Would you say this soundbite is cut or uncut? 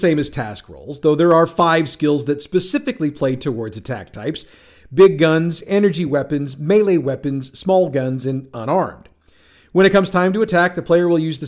uncut